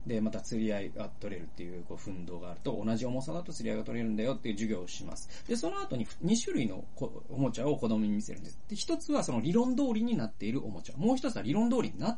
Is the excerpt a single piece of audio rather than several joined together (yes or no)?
yes